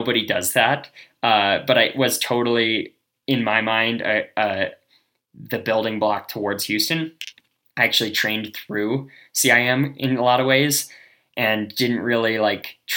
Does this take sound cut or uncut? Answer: uncut